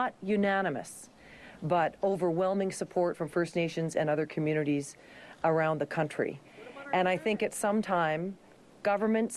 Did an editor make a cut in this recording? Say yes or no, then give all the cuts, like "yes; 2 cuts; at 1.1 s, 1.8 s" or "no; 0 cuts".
no; 0 cuts